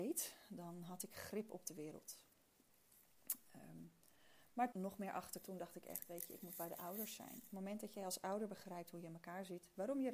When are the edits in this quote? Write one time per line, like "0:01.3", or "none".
0:04.7
0:05.4

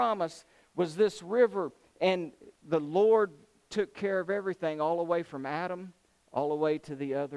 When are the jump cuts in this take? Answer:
0:02.6

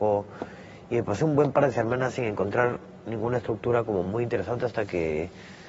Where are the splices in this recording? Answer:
none

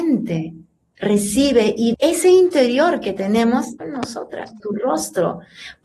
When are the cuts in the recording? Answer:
0:01.9
0:03.8
0:04.6

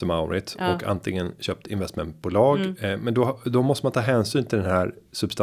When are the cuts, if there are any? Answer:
none

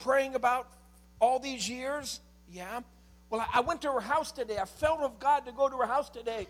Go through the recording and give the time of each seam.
none

